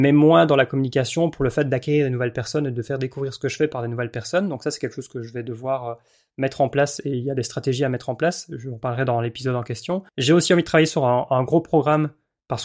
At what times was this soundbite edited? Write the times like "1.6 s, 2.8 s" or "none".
10.1 s, 11.3 s